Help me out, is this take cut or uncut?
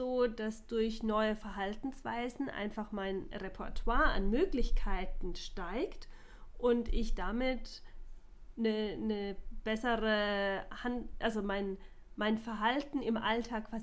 uncut